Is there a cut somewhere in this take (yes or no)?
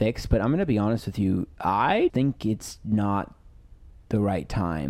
yes